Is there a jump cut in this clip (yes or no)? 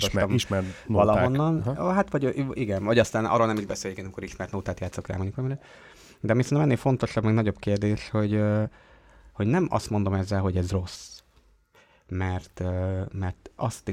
no